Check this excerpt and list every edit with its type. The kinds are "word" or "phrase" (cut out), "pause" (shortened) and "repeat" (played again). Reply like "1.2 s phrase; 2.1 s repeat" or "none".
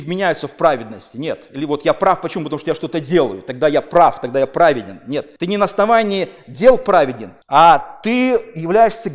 5.4 s pause; 7.4 s pause